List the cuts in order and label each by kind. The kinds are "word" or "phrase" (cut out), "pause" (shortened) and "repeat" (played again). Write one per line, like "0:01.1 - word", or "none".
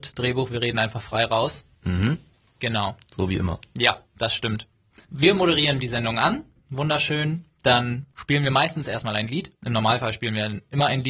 0:02.3 - pause
0:04.1 - pause
0:05.0 - pause
0:09.5 - pause